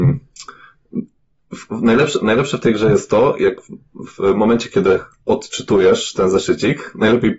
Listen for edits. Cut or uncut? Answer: uncut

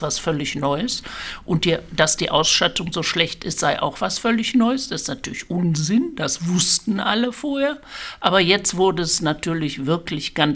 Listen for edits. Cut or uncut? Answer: uncut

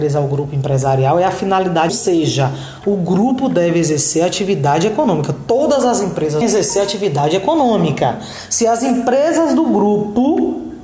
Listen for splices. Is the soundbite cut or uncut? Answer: cut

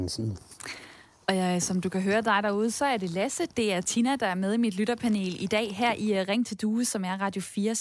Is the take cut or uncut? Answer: uncut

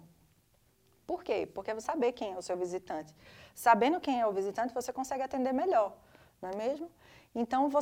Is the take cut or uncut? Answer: cut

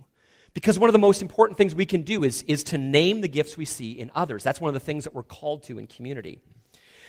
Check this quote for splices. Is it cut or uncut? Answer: uncut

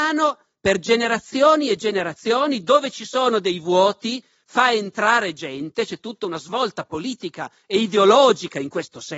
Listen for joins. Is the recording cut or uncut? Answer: uncut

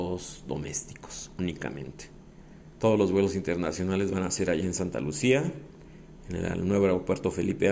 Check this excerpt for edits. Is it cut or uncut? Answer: uncut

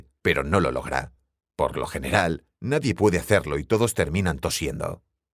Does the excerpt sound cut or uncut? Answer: uncut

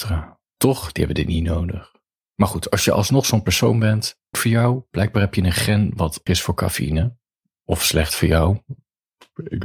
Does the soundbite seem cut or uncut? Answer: cut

